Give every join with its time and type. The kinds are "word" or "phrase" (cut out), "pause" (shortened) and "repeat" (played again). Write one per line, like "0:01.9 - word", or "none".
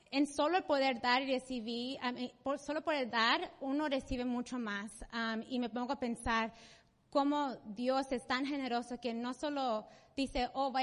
none